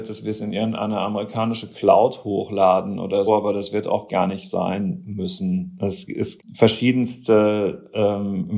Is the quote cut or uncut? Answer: cut